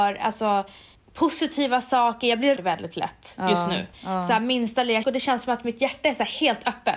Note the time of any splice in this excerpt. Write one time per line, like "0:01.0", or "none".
0:00.9
0:02.6
0:03.9
0:05.0